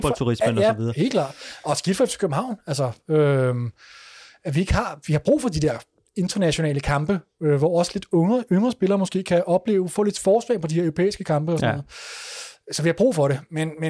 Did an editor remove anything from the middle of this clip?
no; 0 cuts

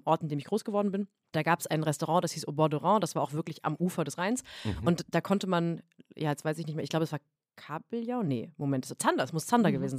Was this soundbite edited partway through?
no; 0 cuts

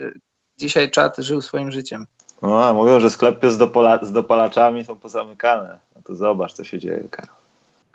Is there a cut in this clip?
yes; 1 cut; at 5.8 s

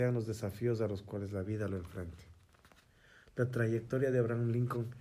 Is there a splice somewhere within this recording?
no; 0 cuts

